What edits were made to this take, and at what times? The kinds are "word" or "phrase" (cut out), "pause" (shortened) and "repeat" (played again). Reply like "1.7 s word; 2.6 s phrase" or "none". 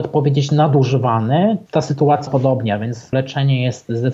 1.7 s word; 2.3 s word; 3.1 s word